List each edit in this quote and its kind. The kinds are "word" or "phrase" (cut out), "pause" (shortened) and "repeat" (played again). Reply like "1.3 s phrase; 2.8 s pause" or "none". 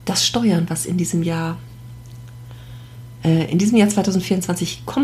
none

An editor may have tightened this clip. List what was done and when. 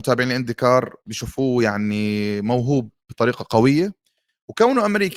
1.0 s pause

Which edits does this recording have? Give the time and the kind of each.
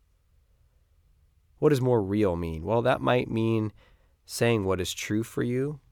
none

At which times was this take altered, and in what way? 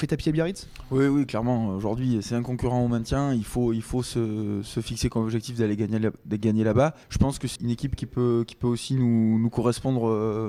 7.0 s pause; 7.6 s word

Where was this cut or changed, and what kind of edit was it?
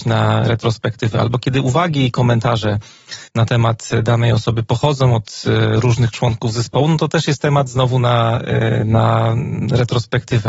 3.3 s pause

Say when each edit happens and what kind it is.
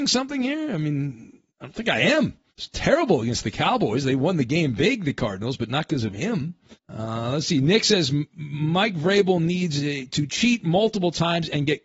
1.5 s pause; 2.5 s pause; 6.7 s pause

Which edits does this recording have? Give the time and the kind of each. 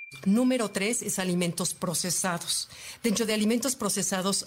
none

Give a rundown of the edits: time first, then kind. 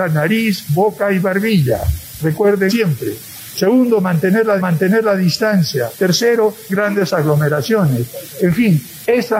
2.7 s word; 4.6 s repeat; 6.7 s word

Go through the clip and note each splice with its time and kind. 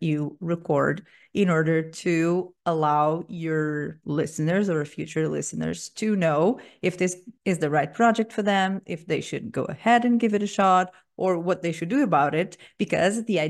7.4 s pause

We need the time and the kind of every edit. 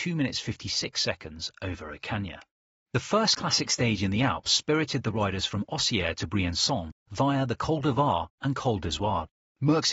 none

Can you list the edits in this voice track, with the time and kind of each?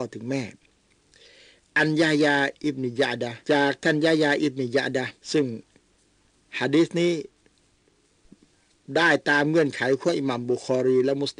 3.4 s pause; 5.2 s pause

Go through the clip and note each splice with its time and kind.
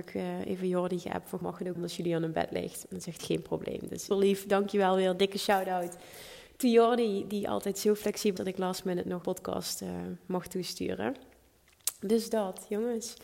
1.4 s word; 1.8 s word; 3.2 s word; 4.1 s word; 8.4 s word; 9.2 s word

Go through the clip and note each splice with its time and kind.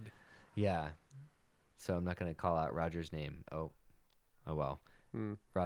none

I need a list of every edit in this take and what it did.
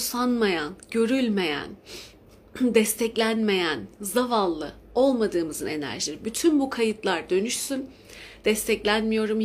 none

